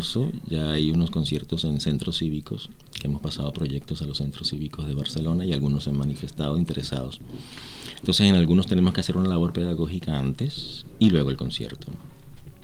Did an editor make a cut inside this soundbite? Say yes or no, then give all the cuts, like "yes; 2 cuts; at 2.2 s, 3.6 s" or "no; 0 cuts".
no; 0 cuts